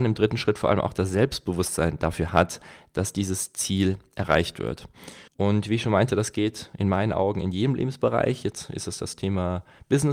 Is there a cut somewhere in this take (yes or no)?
yes